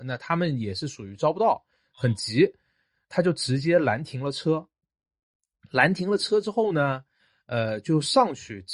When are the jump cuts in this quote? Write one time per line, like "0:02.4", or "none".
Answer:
none